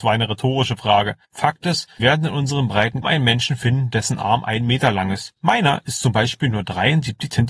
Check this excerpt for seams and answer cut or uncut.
cut